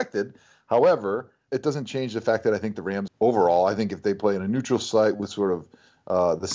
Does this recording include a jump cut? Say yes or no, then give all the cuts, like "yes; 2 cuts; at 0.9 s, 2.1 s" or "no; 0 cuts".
yes; 2 cuts; at 1.5 s, 3.1 s